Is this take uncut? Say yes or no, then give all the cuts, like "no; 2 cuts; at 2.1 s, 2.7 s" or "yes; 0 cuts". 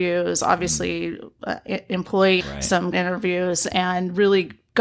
no; 2 cuts; at 2.4 s, 2.9 s